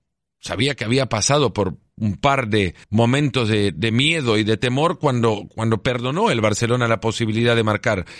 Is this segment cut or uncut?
cut